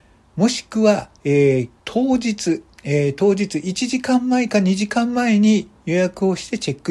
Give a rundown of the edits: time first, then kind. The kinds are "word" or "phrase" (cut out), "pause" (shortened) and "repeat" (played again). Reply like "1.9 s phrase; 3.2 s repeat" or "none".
1.2 s pause; 1.8 s pause